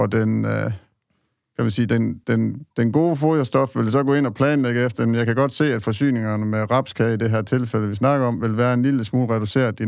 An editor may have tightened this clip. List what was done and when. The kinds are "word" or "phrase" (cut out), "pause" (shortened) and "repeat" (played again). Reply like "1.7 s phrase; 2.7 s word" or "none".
none